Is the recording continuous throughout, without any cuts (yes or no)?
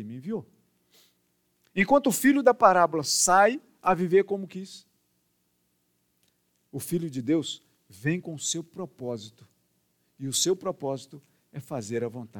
yes